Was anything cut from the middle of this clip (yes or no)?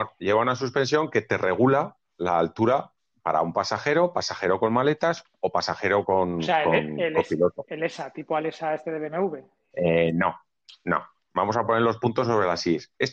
no